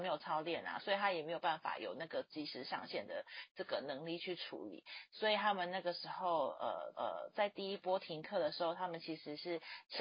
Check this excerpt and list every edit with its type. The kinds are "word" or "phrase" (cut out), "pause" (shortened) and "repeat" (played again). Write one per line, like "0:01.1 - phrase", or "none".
0:06.9 - repeat